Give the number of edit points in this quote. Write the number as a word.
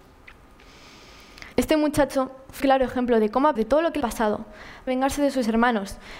five